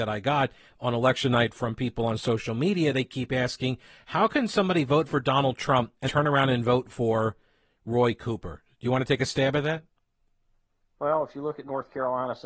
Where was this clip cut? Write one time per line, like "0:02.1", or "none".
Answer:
0:06.1